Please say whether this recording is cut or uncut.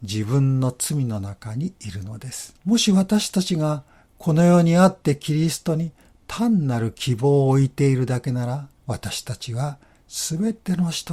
cut